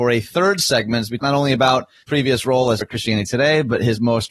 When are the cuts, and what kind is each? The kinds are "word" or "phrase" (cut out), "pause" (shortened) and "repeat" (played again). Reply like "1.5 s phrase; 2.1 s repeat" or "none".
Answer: 1.2 s word; 2.0 s word; 2.8 s word